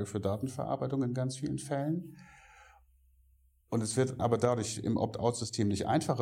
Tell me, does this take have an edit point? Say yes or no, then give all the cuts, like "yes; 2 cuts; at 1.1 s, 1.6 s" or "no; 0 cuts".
yes; 1 cut; at 4.2 s